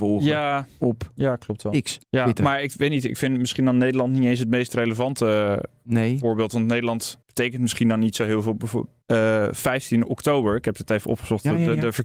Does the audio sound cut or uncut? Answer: cut